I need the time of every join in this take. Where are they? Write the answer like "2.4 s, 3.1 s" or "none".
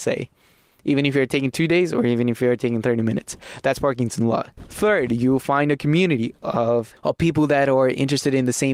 none